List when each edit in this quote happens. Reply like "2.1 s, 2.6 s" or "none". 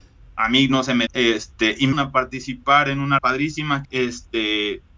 1.1 s, 1.9 s, 3.2 s, 3.8 s